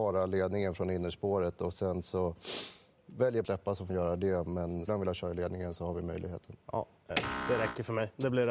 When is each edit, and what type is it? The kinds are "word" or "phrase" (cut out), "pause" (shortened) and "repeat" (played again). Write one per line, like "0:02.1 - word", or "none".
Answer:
0:03.4 - phrase
0:03.9 - word
0:04.9 - word
0:06.6 - pause